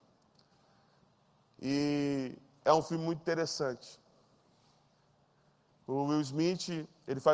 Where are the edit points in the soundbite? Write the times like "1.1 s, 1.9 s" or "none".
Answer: none